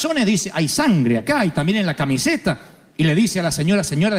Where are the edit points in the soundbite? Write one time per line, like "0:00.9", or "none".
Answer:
none

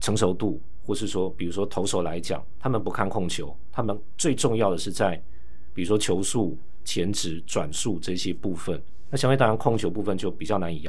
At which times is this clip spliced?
none

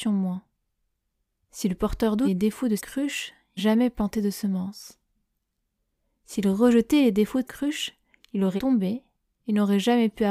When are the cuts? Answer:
0:02.2
0:02.8
0:03.6
0:07.4
0:08.6

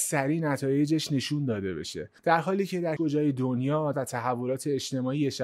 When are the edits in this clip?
0:02.2
0:03.0
0:03.9

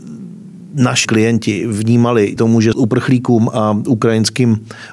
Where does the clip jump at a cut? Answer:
0:01.0
0:02.4
0:02.7

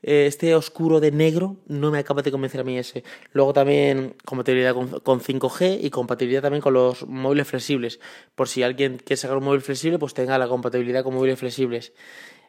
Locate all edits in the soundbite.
0:04.2

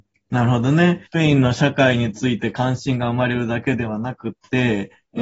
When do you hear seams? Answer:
0:01.1

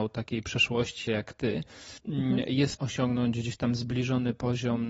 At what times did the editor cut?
0:01.1
0:02.0
0:02.8

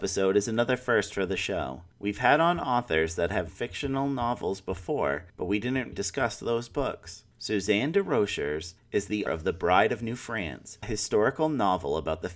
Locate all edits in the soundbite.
0:03.5
0:05.9
0:09.3
0:10.8

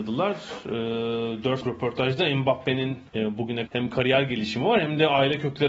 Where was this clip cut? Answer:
0:01.6
0:03.1
0:03.7

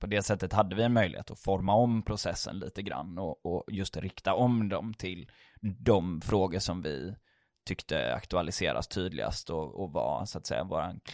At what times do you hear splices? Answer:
none

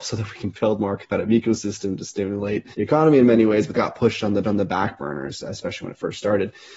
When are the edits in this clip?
0:02.7
0:03.7
0:04.4

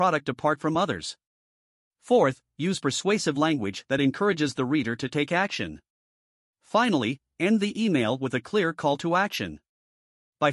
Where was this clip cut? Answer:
none

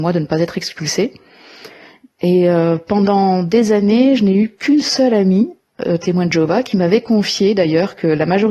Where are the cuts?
none

